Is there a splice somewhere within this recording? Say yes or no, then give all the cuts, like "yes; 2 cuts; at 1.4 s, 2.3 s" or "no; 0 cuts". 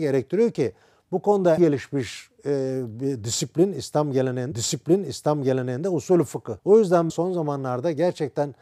yes; 4 cuts; at 1.6 s, 4.5 s, 6.6 s, 7.1 s